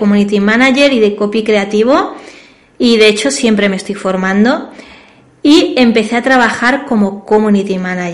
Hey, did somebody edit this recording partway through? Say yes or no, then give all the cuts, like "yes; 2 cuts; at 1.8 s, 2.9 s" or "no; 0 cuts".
no; 0 cuts